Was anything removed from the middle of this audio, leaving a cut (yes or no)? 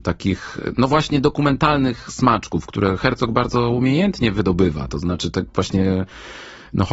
no